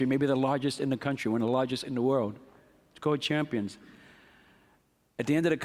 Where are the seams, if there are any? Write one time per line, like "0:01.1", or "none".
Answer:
none